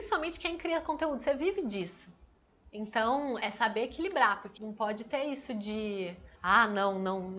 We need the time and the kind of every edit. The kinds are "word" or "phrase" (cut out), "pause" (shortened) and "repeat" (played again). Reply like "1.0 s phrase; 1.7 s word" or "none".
3.4 s word; 4.6 s word; 6.4 s pause

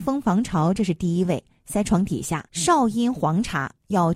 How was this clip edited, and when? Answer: 2.5 s pause

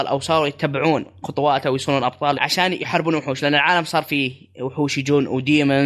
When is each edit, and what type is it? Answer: 2.3 s word

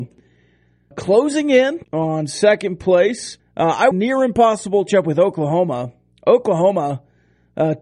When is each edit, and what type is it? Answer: 0.9 s word; 1.8 s pause; 3.4 s pause; 3.9 s phrase; 4.9 s phrase

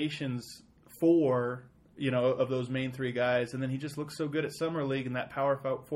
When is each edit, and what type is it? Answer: none

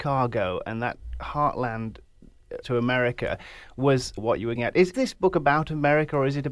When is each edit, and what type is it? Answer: 2.6 s word; 4.2 s word; 4.6 s word; 4.9 s word

